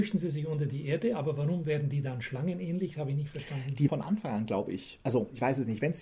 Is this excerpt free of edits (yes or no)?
no